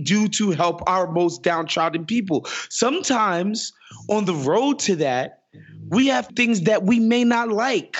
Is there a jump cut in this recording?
yes; 1 cut; at 6.3 s

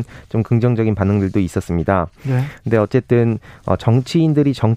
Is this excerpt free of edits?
yes; 0 cuts

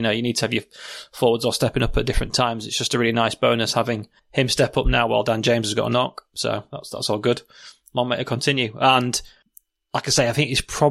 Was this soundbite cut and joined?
no; 0 cuts

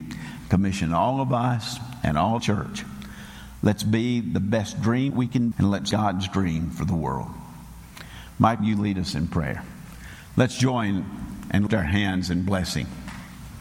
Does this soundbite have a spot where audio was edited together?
yes; 6 cuts; at 2.4 s, 5.1 s, 5.5 s, 5.9 s, 8.6 s, 11.7 s

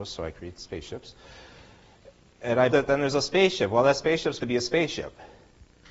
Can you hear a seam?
yes; 2 cuts; at 2.7 s, 4.4 s

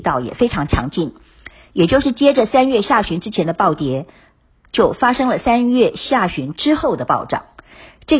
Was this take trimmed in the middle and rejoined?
no; 0 cuts

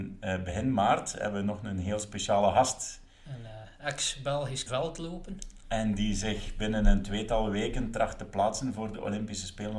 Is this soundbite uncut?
no; 1 cut; at 4.7 s

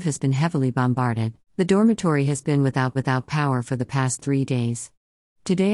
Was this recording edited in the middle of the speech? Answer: yes; 2 cuts; at 1.4 s, 3.0 s

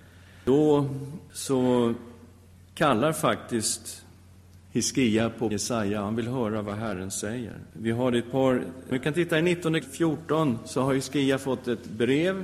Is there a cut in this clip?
yes; 5 cuts; at 2.5 s, 5.5 s, 7.7 s, 8.9 s, 9.8 s

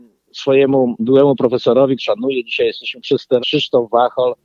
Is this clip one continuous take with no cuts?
no; 4 cuts; at 1.0 s, 2.0 s, 3.0 s, 3.4 s

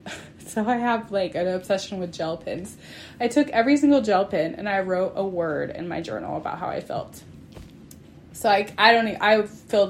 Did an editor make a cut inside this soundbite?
no; 0 cuts

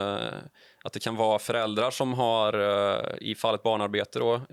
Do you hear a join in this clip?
no; 0 cuts

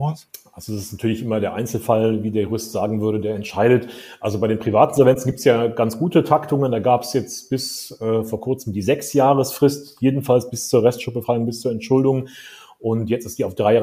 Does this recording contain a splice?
no; 0 cuts

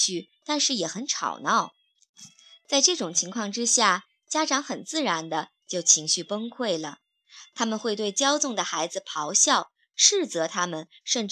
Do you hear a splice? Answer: no; 0 cuts

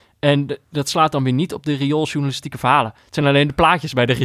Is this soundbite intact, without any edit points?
yes; 0 cuts

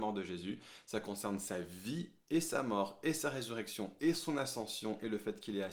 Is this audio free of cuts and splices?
yes; 0 cuts

